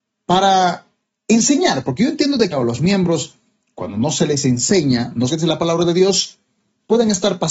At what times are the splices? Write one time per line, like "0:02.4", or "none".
0:02.5
0:05.3